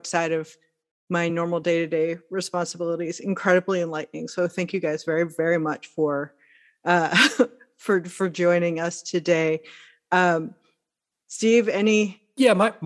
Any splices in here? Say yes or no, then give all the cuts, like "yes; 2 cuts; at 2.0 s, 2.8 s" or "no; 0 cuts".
no; 0 cuts